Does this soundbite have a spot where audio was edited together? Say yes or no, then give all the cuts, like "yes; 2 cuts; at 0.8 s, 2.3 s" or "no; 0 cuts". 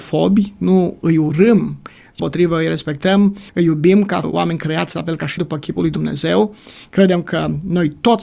yes; 4 cuts; at 2.2 s, 3.5 s, 4.2 s, 5.4 s